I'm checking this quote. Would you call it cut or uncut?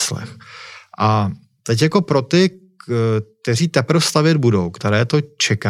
uncut